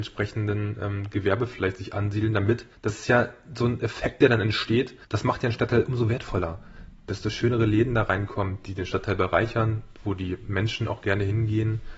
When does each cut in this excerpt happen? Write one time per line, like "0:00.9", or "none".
0:02.7
0:05.0